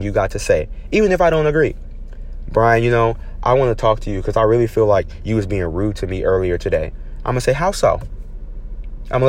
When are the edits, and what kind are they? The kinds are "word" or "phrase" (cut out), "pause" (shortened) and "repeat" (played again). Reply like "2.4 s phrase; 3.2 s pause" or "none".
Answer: none